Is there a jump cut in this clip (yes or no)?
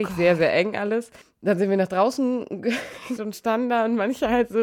yes